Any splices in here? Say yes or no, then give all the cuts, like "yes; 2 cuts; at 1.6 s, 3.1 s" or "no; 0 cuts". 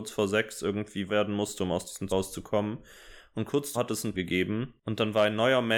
yes; 4 cuts; at 1.1 s, 2.1 s, 3.7 s, 4.1 s